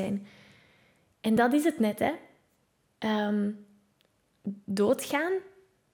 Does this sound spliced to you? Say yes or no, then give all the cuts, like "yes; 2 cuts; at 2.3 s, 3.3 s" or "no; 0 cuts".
no; 0 cuts